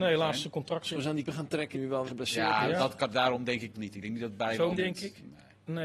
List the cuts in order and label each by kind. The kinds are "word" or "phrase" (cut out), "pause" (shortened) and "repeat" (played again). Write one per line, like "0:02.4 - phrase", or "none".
0:00.9 - phrase
0:01.3 - word
0:01.7 - word
0:02.1 - word
0:03.7 - word
0:04.7 - word